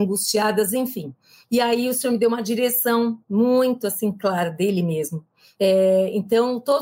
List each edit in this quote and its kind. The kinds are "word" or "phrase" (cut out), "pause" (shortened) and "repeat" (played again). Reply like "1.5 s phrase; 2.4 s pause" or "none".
none